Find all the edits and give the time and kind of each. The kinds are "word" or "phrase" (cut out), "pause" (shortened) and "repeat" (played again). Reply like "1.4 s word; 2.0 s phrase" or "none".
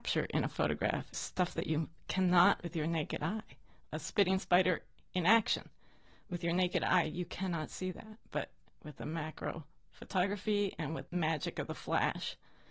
1.1 s word; 2.6 s word; 3.9 s word; 11.1 s word